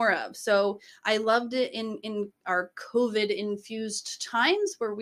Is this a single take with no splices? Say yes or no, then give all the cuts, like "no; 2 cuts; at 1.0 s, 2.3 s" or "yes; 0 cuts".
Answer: yes; 0 cuts